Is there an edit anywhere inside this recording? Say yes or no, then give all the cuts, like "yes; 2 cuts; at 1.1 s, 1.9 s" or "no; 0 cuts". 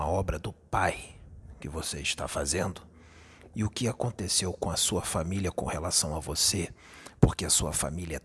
no; 0 cuts